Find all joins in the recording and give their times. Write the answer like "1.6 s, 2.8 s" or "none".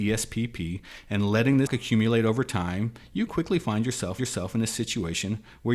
1.7 s, 3.3 s, 4.2 s